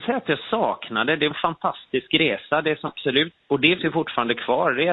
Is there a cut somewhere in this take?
yes; 4 cuts; at 1.3 s, 2.9 s, 3.3 s, 3.8 s

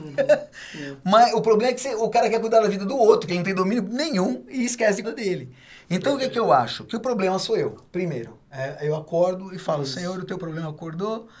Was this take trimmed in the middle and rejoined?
yes; 1 cut; at 5.0 s

